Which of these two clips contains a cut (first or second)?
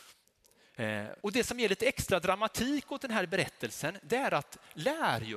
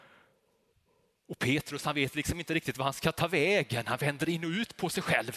first